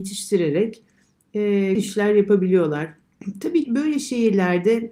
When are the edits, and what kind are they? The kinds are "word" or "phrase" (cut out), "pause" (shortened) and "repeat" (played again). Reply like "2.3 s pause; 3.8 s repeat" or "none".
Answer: 1.7 s word; 3.6 s word